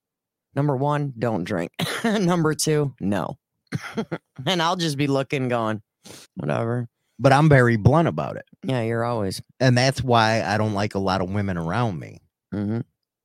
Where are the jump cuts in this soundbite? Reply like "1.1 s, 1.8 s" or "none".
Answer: 6.2 s, 9.5 s